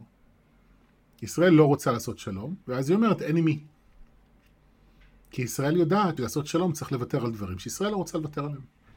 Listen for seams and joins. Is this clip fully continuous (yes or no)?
no